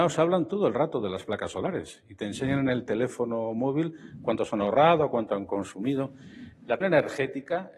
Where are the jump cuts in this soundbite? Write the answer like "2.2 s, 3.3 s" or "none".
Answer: 6.8 s